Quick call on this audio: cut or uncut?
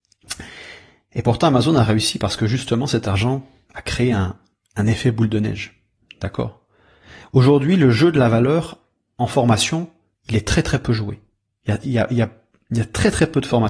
uncut